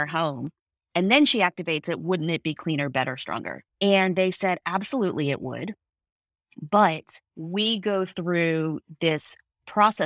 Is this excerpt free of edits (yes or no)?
no